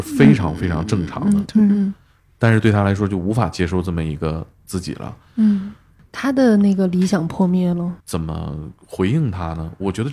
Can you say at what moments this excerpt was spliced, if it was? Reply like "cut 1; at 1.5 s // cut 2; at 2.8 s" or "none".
cut 1; at 8.0 s